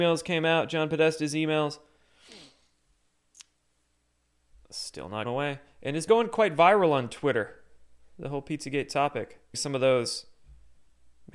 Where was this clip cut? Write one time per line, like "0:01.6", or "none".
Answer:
0:05.2
0:06.1
0:09.5

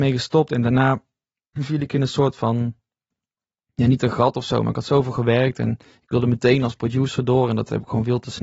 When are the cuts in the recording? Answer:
none

